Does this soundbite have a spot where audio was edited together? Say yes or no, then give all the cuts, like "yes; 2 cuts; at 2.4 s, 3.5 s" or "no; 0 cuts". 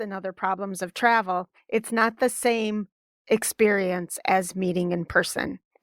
no; 0 cuts